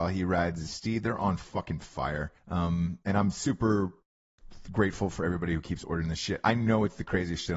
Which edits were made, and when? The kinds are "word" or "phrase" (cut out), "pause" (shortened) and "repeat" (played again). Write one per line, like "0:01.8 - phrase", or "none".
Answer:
0:02.4 - pause